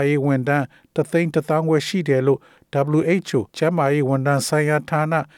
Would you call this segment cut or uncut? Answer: cut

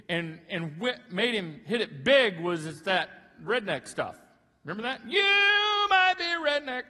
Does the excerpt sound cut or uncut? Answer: uncut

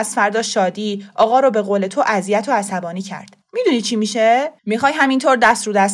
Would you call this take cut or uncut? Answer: cut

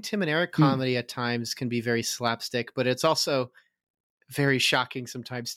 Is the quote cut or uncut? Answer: uncut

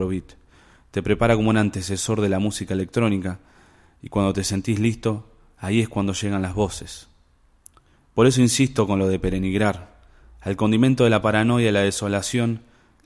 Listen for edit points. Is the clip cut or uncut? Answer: uncut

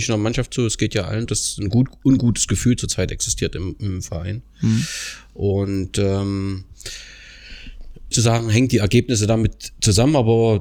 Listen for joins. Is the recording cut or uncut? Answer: cut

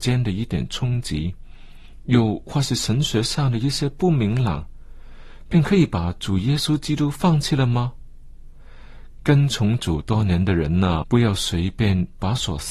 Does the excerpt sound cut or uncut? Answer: cut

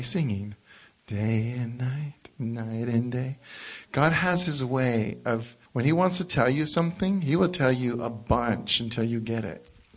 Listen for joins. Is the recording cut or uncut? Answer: cut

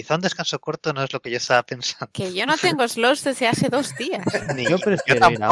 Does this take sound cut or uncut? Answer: uncut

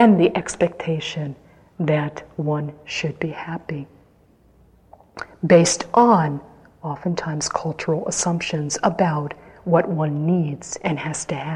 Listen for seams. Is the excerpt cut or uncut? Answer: uncut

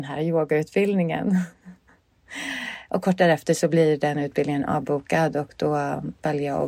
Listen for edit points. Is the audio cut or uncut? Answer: uncut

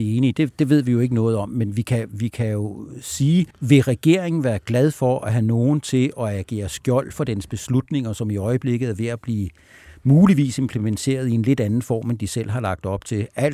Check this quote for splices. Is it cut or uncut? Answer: cut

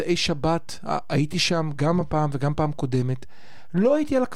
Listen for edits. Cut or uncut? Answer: uncut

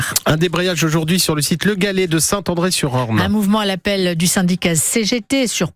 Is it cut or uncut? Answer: uncut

